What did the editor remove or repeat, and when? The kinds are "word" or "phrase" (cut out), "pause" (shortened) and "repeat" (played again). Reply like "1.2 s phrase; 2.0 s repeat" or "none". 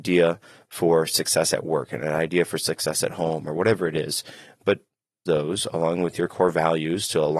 5.3 s word